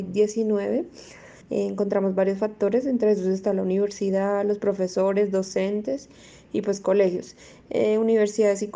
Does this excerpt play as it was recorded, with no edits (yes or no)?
no